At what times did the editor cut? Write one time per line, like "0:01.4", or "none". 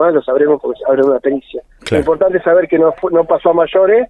none